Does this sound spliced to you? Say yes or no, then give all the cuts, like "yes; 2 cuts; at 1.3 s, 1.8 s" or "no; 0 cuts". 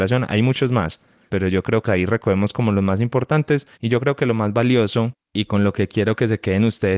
yes; 3 cuts; at 1.3 s, 1.9 s, 3.7 s